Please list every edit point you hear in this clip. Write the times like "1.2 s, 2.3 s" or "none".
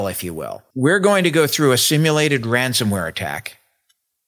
none